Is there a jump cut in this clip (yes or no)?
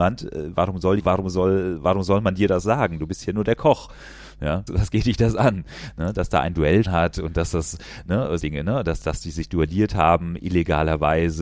yes